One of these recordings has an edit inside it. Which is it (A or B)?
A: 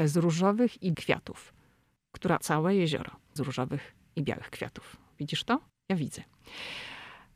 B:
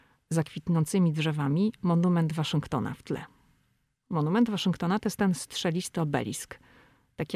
A